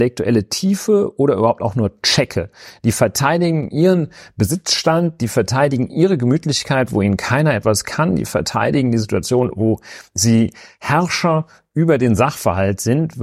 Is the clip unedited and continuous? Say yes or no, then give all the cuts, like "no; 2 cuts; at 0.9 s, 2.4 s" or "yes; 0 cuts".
yes; 0 cuts